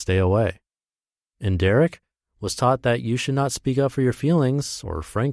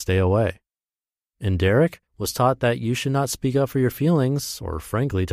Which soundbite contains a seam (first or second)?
second